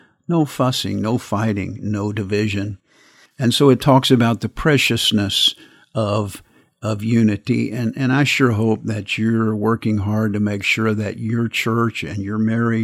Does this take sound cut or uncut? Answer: uncut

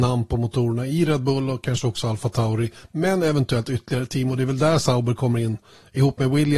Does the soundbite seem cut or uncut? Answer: uncut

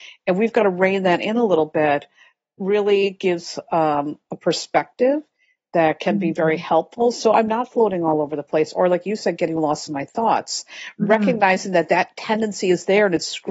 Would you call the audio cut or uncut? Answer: uncut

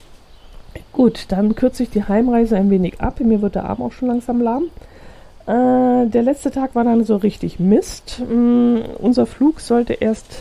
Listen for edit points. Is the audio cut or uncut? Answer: uncut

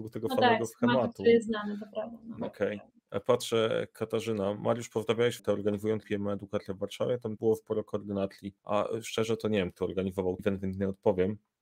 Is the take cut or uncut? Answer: cut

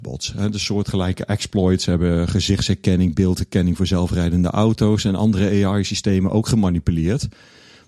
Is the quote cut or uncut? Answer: uncut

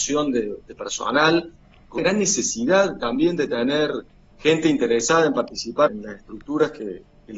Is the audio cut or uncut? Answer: cut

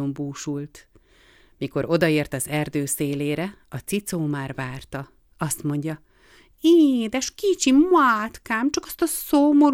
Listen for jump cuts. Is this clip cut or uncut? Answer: uncut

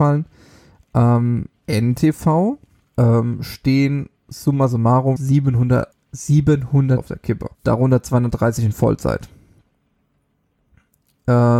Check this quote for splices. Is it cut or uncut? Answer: cut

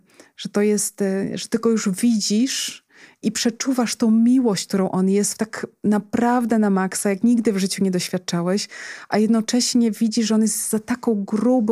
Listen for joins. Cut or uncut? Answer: cut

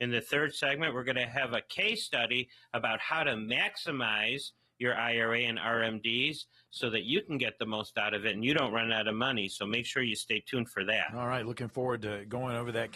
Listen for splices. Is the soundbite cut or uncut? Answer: uncut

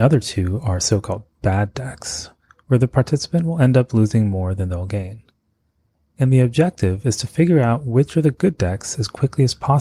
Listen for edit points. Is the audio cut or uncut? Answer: uncut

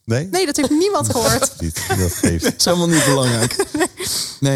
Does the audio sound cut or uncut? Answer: cut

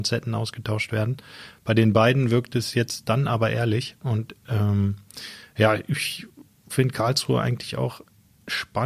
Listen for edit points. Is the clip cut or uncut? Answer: uncut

